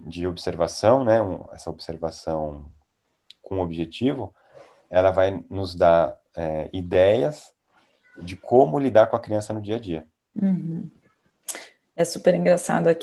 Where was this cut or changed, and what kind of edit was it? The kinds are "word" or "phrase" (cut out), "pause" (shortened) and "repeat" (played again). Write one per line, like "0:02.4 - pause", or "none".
none